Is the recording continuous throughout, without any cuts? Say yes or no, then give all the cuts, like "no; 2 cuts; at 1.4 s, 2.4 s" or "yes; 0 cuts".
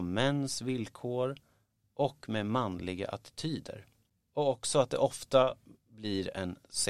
yes; 0 cuts